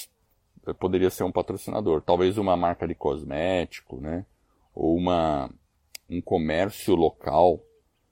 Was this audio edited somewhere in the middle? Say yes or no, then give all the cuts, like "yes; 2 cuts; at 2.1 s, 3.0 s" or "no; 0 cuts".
no; 0 cuts